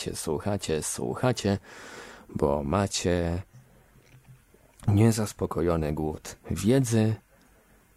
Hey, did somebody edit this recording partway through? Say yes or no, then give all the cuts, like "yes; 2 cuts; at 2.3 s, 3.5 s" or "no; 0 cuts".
no; 0 cuts